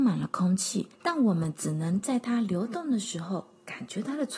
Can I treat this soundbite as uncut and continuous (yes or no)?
no